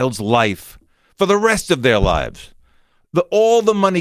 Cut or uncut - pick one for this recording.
uncut